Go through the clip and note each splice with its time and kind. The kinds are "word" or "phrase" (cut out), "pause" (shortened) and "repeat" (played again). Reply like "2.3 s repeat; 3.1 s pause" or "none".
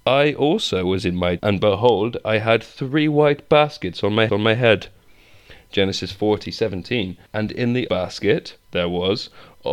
1.4 s word; 4.3 s repeat; 7.3 s pause; 7.9 s word